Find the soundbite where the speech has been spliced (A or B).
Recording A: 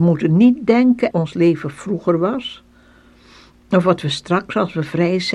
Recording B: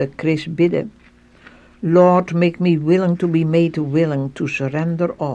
A